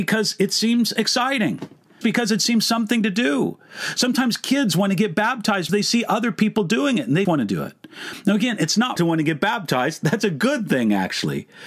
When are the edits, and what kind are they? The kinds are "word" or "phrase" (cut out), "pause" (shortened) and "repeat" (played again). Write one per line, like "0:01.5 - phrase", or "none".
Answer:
0:02.0 - word
0:05.7 - word
0:07.3 - word
0:09.0 - word